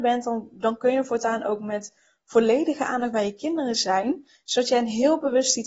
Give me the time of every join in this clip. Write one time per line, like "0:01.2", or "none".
none